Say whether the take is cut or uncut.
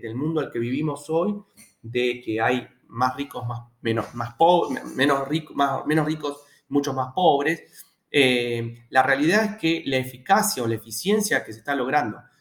uncut